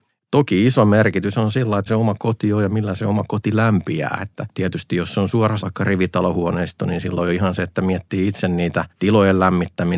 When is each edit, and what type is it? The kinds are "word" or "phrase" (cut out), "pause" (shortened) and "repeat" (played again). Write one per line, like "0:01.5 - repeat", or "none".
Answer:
0:01.9 - word
0:05.6 - word